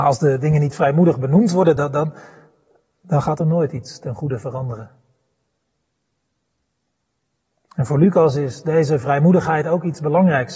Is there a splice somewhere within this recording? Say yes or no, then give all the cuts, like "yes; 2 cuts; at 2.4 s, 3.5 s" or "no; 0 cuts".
no; 0 cuts